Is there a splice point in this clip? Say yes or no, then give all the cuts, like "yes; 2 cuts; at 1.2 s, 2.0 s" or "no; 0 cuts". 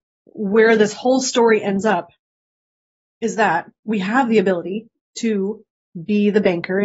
no; 0 cuts